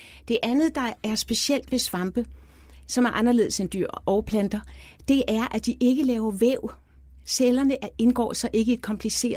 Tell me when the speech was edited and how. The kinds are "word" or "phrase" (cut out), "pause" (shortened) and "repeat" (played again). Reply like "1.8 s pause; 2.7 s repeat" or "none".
none